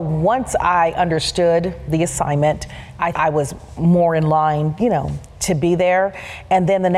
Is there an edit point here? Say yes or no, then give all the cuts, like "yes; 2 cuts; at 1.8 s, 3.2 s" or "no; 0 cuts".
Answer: yes; 1 cut; at 3.1 s